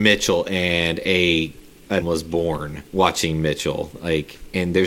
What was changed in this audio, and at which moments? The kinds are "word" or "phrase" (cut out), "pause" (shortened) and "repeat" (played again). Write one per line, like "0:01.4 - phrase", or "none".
0:02.0 - word
0:02.9 - pause